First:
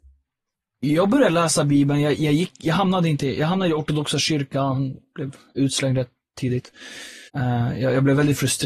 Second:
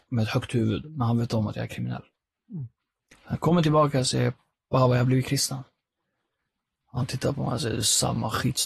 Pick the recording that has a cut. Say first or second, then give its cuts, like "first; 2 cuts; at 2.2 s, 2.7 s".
first; 1 cut; at 7.3 s